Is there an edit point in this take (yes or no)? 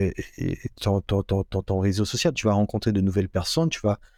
no